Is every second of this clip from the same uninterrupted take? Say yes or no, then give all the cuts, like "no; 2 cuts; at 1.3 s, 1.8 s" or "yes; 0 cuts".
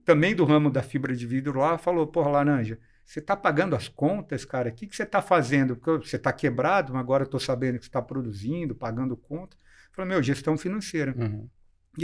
yes; 0 cuts